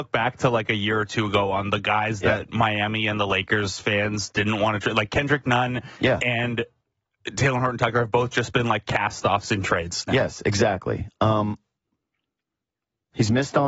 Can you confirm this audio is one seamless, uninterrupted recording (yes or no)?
yes